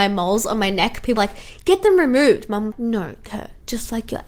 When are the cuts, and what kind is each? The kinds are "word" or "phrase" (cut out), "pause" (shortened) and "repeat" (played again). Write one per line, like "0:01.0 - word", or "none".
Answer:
0:01.2 - word
0:02.7 - word
0:03.3 - word

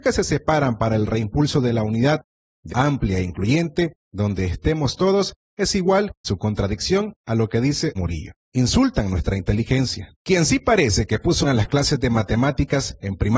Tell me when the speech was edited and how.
0:02.7 - phrase
0:06.2 - word
0:08.0 - word
0:08.4 - pause
0:10.2 - pause
0:11.4 - word

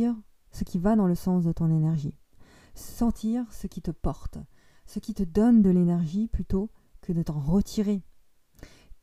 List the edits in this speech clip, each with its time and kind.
none

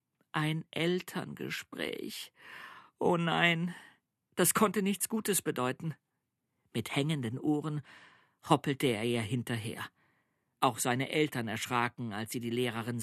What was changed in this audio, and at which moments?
none

